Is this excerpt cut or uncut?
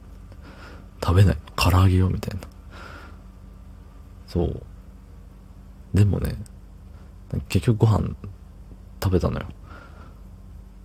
cut